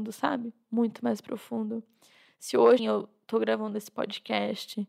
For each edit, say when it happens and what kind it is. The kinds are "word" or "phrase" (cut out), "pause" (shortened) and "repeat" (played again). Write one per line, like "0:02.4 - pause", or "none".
0:02.8 - word